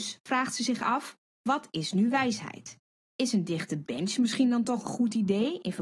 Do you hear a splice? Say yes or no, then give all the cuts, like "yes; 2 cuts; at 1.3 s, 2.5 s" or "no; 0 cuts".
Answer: no; 0 cuts